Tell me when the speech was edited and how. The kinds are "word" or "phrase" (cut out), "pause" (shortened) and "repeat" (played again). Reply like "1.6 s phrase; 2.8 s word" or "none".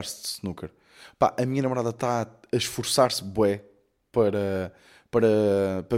none